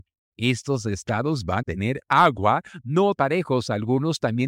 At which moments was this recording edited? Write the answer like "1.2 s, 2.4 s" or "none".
1.6 s, 3.2 s